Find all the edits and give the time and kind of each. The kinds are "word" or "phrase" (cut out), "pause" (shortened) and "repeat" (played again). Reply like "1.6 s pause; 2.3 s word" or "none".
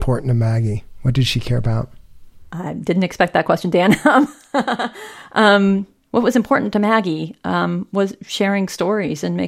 none